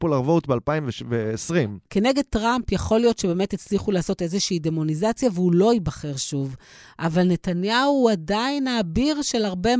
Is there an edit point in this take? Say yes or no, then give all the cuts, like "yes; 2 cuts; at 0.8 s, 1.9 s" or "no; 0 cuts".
no; 0 cuts